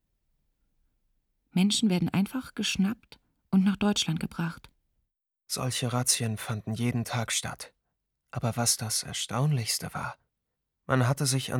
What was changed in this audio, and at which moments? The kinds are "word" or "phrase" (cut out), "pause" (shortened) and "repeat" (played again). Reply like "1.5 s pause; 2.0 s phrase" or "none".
none